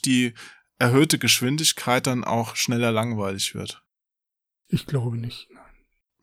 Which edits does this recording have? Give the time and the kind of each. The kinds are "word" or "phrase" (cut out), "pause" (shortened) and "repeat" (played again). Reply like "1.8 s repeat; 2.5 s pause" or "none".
none

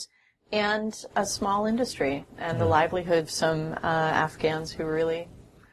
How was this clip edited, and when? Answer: 1.1 s word; 2.3 s word; 3.3 s word

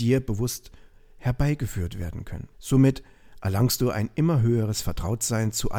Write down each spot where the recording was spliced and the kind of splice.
2.5 s pause

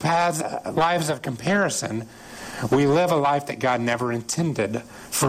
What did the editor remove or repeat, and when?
none

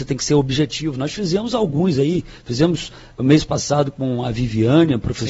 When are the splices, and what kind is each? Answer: none

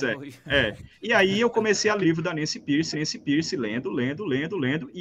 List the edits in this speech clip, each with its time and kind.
0.9 s pause; 2.0 s word; 2.9 s repeat

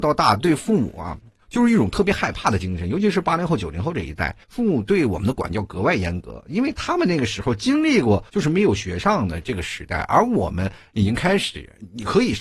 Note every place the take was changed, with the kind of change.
4.4 s pause; 8.3 s pause

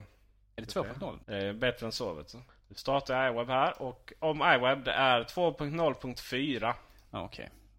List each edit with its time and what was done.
1.2 s pause

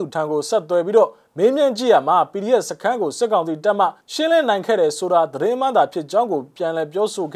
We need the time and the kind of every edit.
4.0 s pause

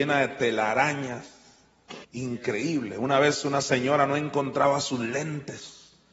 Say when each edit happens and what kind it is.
2.0 s pause

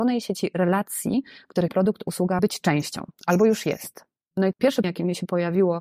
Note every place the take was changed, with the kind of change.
1.7 s word; 2.4 s word; 4.5 s word; 4.8 s word

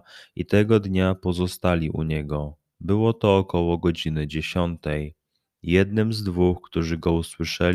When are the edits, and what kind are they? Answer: none

